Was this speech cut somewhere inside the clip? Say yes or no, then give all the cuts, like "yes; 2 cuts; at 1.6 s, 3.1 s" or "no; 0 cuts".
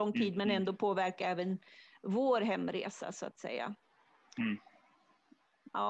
no; 0 cuts